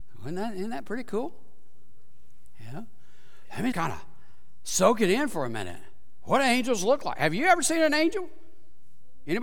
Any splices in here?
yes; 1 cut; at 3.7 s

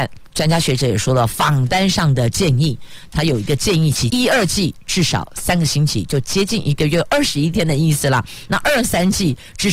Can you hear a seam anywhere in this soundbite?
yes; 1 cut; at 4.1 s

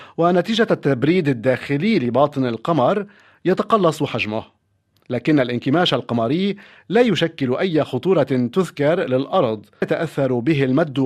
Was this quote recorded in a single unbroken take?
no; 1 cut; at 9.8 s

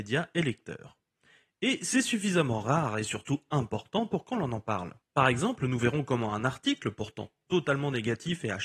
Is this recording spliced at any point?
yes; 1 cut; at 5.0 s

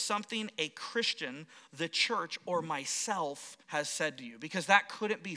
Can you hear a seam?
yes; 1 cut; at 3.6 s

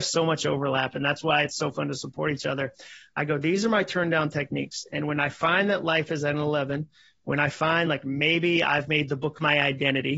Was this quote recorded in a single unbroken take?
yes; 0 cuts

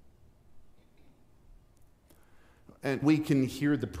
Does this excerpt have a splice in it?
yes; 1 cut; at 3.0 s

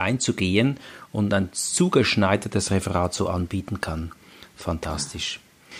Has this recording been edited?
no; 0 cuts

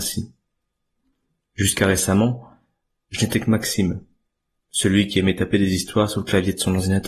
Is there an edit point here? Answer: no; 0 cuts

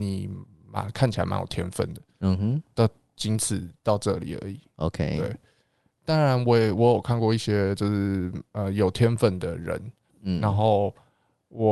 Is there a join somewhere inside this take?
no; 0 cuts

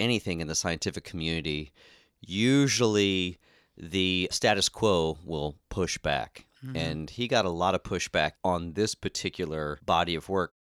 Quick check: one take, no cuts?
yes; 0 cuts

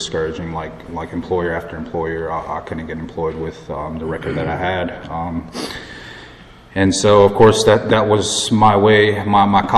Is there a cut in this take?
no; 0 cuts

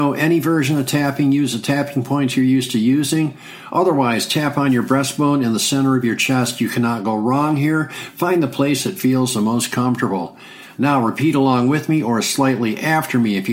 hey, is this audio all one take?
yes; 0 cuts

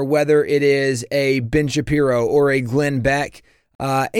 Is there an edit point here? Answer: no; 0 cuts

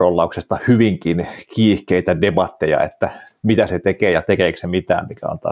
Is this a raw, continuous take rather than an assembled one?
yes; 0 cuts

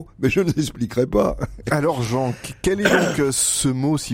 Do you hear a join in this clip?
no; 0 cuts

